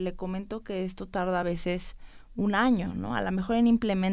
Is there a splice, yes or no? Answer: no